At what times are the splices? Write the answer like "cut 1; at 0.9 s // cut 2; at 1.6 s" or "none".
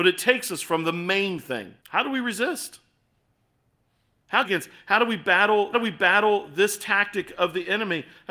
cut 1; at 1.8 s // cut 2; at 4.4 s // cut 3; at 5.7 s